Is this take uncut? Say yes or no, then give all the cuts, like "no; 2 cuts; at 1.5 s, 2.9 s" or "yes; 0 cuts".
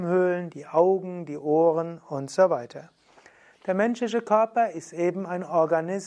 yes; 0 cuts